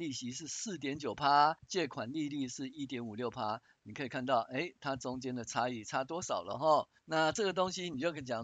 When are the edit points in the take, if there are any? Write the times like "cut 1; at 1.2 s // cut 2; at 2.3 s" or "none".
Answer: cut 1; at 1.6 s // cut 2; at 7.0 s